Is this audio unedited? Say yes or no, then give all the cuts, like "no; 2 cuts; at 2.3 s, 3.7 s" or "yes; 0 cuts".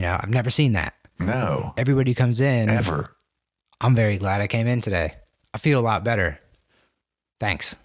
yes; 0 cuts